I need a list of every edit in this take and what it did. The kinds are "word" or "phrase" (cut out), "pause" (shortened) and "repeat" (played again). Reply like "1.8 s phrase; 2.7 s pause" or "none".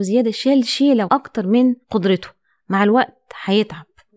1.1 s word; 1.8 s pause